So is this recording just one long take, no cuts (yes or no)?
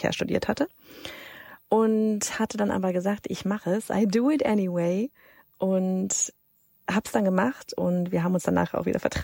yes